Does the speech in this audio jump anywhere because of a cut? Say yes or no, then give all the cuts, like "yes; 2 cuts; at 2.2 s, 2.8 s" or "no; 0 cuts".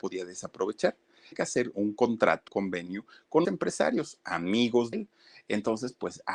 yes; 5 cuts; at 1.3 s, 1.7 s, 2.5 s, 3.4 s, 4.9 s